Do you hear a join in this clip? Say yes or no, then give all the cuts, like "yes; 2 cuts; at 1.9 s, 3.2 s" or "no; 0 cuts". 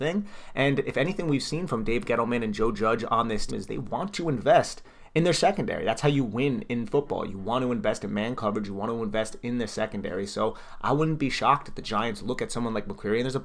yes; 1 cut; at 3.5 s